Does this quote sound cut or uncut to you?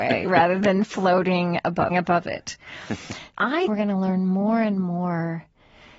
cut